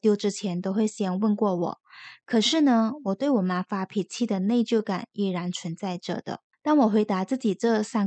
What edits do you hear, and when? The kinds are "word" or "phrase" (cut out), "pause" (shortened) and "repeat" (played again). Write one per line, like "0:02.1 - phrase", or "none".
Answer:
0:06.5 - pause